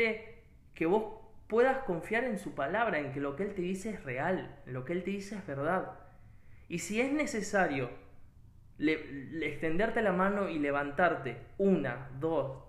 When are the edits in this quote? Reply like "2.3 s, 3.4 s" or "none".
none